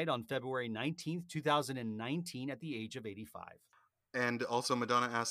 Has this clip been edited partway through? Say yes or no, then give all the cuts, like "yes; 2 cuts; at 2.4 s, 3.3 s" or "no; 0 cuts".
no; 0 cuts